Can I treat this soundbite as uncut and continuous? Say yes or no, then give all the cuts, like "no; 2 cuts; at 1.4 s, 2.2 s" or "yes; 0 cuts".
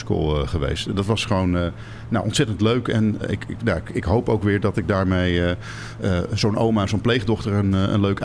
no; 1 cut; at 3.2 s